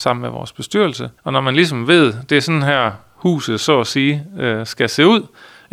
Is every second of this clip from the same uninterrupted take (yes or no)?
no